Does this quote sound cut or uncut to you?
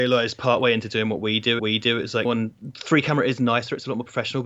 cut